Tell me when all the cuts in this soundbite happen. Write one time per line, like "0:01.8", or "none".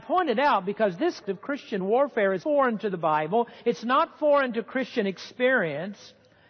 0:01.2
0:02.4